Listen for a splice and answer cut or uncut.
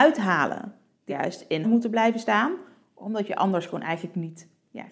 cut